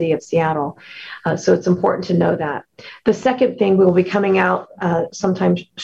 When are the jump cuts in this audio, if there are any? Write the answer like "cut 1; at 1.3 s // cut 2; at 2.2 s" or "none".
none

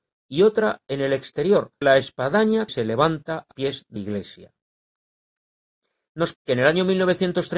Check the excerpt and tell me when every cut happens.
cut 1; at 1.8 s // cut 2; at 2.7 s // cut 3; at 3.5 s // cut 4; at 4.0 s // cut 5; at 6.3 s

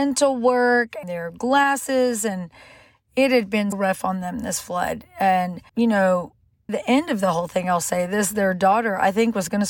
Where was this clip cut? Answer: cut 1; at 1.0 s // cut 2; at 3.7 s // cut 3; at 5.7 s // cut 4; at 6.7 s

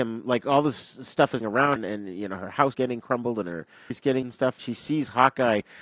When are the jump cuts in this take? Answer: cut 1; at 1.4 s // cut 2; at 1.8 s // cut 3; at 2.7 s // cut 4; at 3.9 s // cut 5; at 4.2 s // cut 6; at 4.6 s

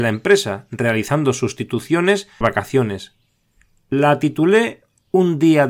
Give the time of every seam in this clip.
cut 1; at 2.4 s

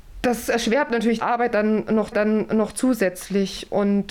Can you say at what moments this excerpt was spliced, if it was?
cut 1; at 1.2 s // cut 2; at 2.1 s

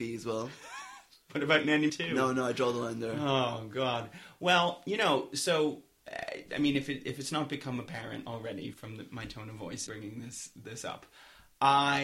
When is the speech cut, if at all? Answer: cut 1; at 1.9 s // cut 2; at 8.7 s // cut 3; at 9.9 s

